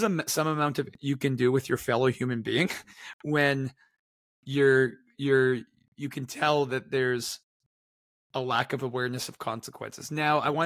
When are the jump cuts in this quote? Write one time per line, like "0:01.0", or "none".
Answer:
0:00.9
0:04.3